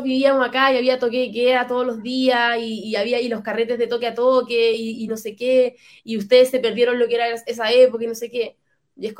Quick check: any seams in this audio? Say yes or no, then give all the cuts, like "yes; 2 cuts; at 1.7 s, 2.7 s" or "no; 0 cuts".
no; 0 cuts